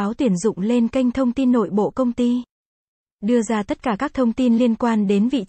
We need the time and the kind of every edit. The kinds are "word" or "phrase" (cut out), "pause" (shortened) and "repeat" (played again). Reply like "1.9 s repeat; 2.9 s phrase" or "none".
none